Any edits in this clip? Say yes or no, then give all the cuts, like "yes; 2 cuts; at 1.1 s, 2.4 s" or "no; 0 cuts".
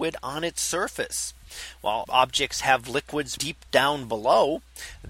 yes; 2 cuts; at 2.0 s, 3.4 s